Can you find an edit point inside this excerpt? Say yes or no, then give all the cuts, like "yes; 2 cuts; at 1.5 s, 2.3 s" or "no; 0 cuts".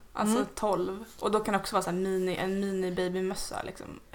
no; 0 cuts